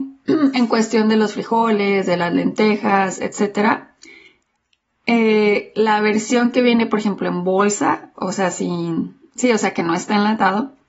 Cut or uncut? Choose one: uncut